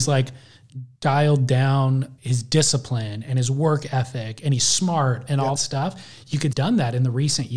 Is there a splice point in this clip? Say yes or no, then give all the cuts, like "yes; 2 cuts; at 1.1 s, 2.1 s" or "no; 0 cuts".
yes; 4 cuts; at 1.0 s, 2.2 s, 5.6 s, 6.5 s